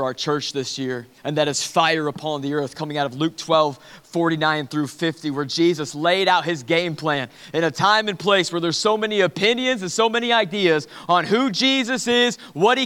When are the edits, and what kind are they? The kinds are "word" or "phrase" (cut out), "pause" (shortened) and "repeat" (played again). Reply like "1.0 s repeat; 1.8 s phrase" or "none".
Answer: 1.2 s pause